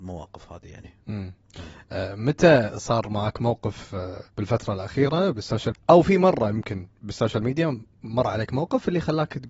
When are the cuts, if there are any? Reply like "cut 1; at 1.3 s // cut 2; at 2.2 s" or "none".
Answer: cut 1; at 4.3 s // cut 2; at 5.7 s // cut 3; at 6.9 s